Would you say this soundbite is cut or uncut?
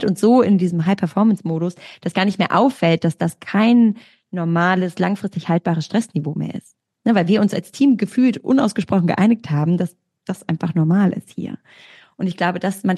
uncut